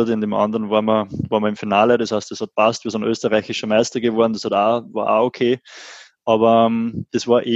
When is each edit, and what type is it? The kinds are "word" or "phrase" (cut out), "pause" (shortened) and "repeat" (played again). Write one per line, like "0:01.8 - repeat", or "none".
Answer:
none

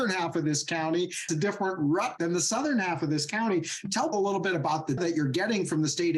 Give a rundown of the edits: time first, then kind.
0:01.3 - word
0:02.2 - word
0:04.1 - word
0:05.0 - word

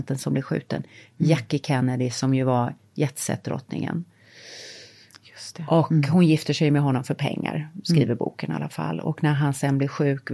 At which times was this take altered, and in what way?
none

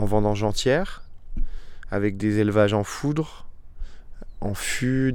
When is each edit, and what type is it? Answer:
none

